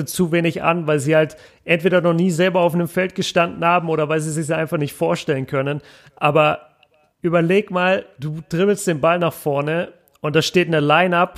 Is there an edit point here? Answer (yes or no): no